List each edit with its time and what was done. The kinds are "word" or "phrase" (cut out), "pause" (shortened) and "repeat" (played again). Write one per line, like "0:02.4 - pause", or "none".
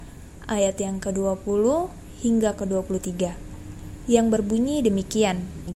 none